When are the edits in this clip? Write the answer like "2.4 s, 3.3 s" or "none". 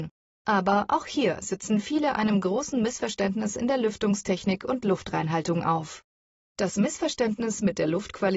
none

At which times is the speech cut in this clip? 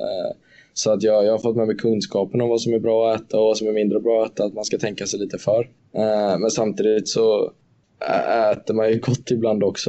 none

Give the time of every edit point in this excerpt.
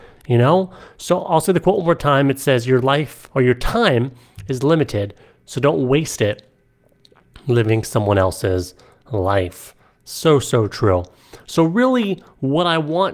none

